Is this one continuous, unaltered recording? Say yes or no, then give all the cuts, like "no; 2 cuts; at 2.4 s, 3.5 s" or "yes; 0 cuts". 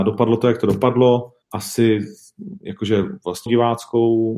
no; 2 cuts; at 1.4 s, 3.5 s